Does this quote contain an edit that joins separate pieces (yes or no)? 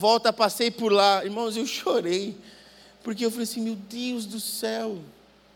no